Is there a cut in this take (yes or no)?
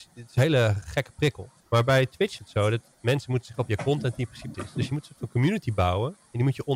yes